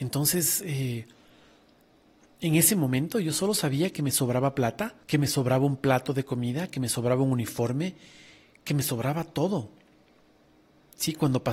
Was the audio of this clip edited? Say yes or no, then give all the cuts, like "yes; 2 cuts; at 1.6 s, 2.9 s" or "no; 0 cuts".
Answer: yes; 1 cut; at 5.0 s